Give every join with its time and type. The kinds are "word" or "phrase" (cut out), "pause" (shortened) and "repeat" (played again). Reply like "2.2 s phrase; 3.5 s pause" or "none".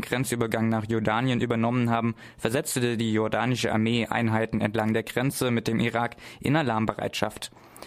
none